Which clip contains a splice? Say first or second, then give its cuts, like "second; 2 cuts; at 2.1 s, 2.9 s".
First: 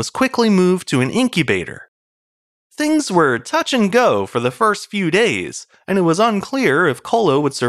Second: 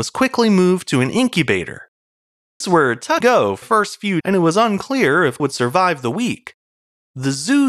second; 5 cuts; at 2.6 s, 3.2 s, 3.6 s, 4.2 s, 5.4 s